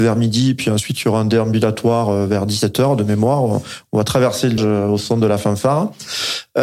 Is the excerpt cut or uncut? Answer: cut